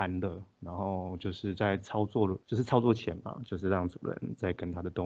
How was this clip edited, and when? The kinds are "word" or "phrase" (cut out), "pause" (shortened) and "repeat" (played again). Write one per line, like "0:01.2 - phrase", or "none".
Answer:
0:02.4 - pause